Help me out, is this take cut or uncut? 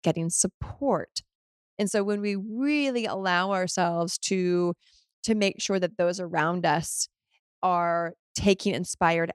uncut